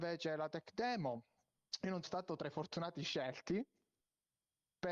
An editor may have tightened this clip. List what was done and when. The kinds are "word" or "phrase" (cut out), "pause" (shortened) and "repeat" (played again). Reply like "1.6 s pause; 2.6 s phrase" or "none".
2.0 s word